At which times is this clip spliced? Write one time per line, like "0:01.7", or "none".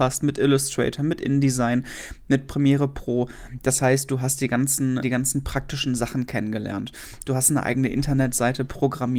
0:05.0